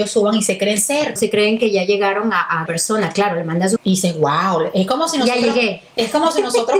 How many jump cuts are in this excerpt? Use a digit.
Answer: 3